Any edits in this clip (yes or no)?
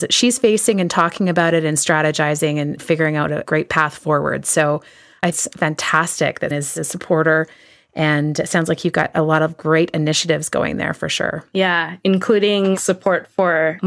yes